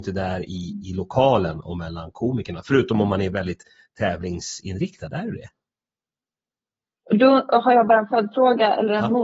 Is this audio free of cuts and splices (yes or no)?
yes